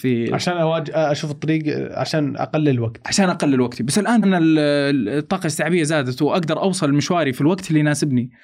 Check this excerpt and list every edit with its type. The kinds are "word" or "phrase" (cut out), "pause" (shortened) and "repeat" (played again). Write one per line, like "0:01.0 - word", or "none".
0:04.2 - word

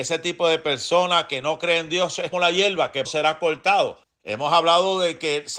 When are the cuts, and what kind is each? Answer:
0:02.3 - word
0:03.0 - word
0:04.0 - pause

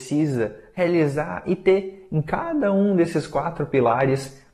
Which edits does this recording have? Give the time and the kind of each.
none

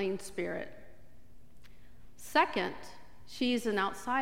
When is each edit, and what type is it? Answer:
none

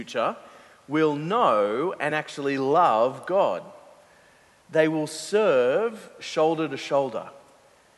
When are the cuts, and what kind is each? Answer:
none

